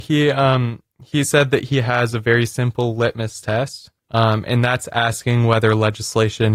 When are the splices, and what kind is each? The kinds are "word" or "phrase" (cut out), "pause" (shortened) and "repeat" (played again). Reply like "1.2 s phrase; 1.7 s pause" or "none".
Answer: 4.0 s pause